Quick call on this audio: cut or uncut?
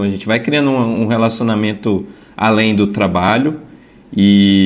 uncut